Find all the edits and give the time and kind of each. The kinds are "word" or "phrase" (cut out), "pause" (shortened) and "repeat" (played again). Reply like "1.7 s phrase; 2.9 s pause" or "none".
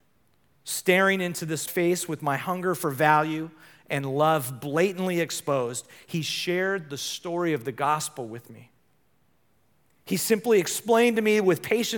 1.7 s word